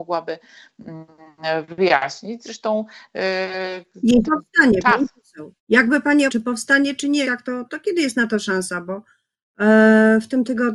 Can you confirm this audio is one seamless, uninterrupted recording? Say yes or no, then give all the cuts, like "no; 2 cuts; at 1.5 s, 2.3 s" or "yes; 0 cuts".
no; 5 cuts; at 4.2 s, 5.6 s, 6.3 s, 7.2 s, 7.7 s